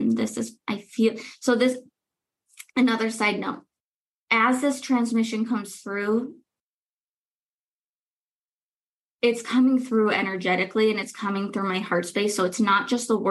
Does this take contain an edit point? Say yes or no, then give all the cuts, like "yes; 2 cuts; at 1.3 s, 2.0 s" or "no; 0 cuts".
no; 0 cuts